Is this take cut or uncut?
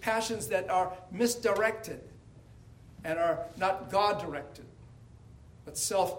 uncut